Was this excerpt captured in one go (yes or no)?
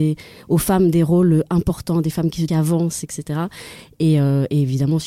no